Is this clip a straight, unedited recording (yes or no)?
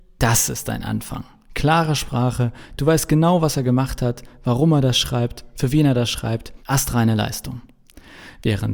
no